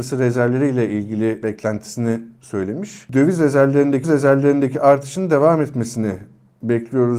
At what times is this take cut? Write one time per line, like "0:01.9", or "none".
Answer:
0:04.0